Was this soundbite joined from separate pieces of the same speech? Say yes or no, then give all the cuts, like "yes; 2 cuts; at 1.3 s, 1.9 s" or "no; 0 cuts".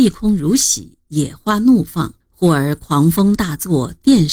yes; 1 cut; at 2.2 s